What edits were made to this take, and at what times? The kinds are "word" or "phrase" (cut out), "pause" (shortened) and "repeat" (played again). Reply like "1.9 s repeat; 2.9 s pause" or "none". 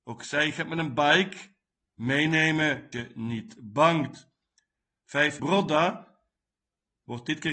2.9 s word; 5.4 s word